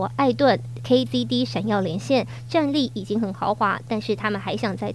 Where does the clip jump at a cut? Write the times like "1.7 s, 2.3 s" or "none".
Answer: 1.1 s